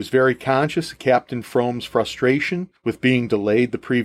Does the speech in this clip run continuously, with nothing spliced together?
no; 1 cut; at 2.8 s

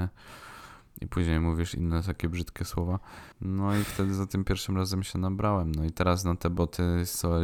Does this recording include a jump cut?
yes; 1 cut; at 3.3 s

